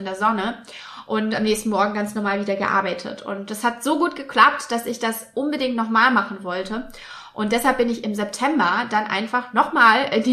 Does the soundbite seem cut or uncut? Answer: uncut